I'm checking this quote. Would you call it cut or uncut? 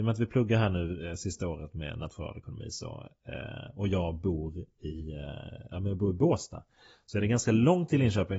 uncut